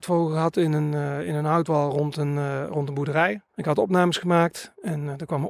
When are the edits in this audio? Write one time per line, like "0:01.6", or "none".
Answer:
0:03.5